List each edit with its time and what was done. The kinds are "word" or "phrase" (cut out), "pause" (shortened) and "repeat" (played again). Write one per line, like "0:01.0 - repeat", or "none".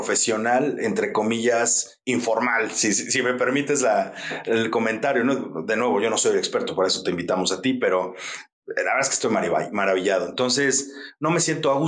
none